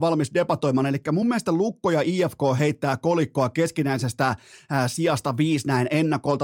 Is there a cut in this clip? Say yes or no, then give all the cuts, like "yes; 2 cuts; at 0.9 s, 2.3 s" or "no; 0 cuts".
no; 0 cuts